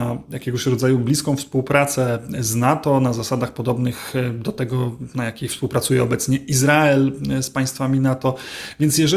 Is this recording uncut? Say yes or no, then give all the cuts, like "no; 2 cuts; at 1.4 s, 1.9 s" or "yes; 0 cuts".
yes; 0 cuts